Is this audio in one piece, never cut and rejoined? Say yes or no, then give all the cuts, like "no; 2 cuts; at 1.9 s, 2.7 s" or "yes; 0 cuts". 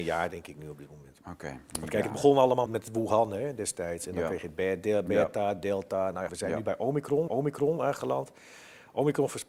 no; 3 cuts; at 2.7 s, 6.3 s, 7.3 s